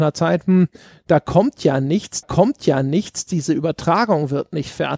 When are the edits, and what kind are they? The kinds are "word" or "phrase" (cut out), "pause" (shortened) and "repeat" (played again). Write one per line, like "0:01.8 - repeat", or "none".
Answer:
0:02.2 - repeat